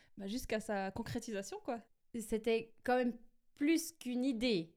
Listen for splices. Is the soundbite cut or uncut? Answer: uncut